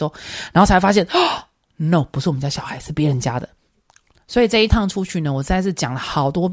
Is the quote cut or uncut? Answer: uncut